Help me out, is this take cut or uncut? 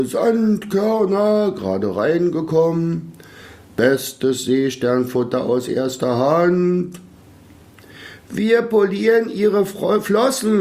uncut